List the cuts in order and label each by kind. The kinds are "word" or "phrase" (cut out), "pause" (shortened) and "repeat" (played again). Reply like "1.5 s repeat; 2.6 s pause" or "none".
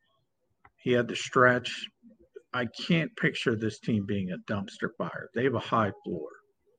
none